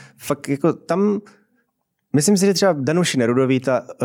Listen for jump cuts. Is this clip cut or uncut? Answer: uncut